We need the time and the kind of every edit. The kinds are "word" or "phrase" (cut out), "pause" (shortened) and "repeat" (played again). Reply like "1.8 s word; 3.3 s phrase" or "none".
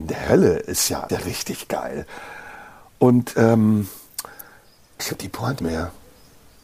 1.1 s word; 5.0 s word; 5.6 s word